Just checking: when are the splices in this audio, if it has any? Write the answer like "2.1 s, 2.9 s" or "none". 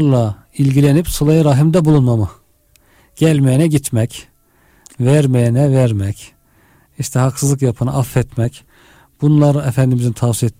none